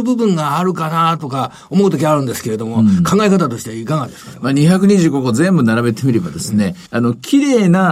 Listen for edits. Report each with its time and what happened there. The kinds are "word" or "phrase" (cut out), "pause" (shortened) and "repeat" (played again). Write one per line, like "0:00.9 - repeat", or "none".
0:06.9 - pause